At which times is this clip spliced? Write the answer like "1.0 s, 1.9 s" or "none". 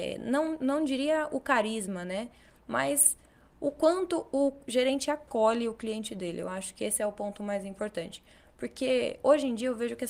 none